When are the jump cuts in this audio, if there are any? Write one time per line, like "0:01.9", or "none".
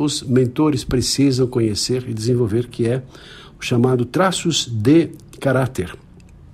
none